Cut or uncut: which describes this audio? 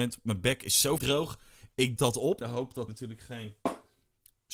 cut